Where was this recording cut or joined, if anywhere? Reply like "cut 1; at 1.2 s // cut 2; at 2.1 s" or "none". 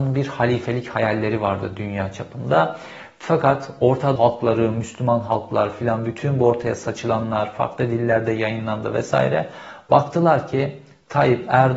cut 1; at 4.2 s